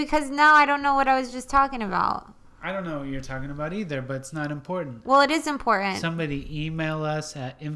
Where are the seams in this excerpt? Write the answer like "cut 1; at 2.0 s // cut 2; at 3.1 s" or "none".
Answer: none